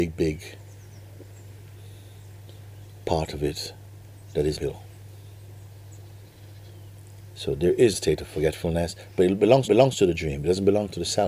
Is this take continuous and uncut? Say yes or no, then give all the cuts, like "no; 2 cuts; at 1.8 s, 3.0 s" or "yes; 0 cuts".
no; 3 cuts; at 4.6 s, 7.9 s, 9.7 s